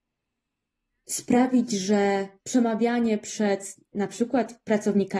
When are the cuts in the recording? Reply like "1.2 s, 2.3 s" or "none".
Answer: 2.4 s